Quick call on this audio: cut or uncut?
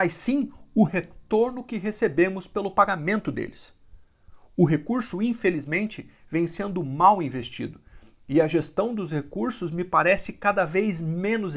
uncut